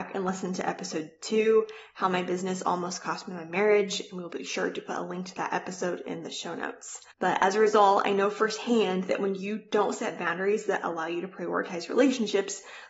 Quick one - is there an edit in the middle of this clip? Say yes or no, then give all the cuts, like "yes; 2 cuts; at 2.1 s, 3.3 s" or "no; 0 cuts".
yes; 1 cut; at 7.1 s